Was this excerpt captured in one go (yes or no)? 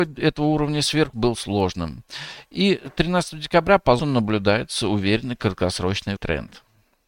no